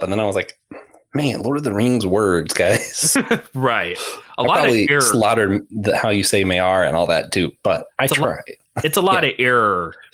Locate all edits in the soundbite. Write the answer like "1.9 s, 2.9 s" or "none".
7.9 s